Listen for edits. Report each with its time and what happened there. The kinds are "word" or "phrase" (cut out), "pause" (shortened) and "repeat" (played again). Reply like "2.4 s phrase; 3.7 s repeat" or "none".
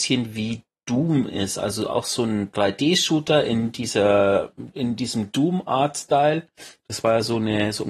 none